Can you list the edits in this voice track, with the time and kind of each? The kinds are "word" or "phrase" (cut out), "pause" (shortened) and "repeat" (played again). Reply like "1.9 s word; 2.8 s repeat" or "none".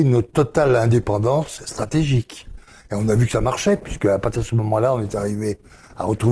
none